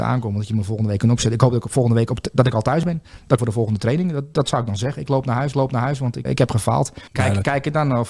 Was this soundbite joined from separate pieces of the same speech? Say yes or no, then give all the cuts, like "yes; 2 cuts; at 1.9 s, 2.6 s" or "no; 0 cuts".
yes; 4 cuts; at 3.4 s, 5.5 s, 6.3 s, 7.1 s